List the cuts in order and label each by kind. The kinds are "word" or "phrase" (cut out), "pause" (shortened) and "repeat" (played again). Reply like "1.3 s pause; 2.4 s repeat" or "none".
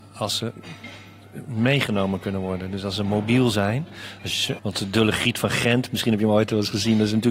4.6 s word